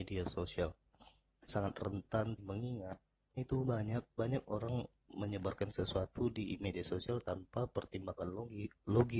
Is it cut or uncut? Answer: cut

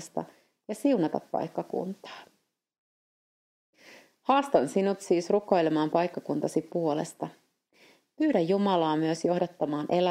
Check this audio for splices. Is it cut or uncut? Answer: uncut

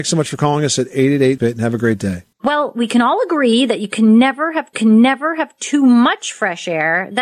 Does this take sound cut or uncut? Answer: cut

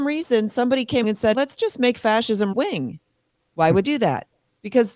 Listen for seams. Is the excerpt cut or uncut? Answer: cut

